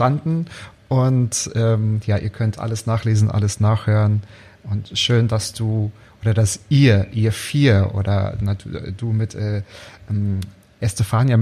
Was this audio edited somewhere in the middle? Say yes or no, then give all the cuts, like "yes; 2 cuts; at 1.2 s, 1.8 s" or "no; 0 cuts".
no; 0 cuts